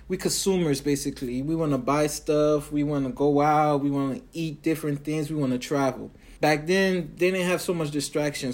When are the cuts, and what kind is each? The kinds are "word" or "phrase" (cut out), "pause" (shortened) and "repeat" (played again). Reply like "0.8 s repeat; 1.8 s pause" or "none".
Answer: 6.4 s pause